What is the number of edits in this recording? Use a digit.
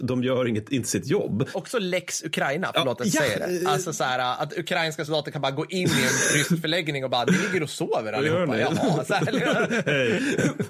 0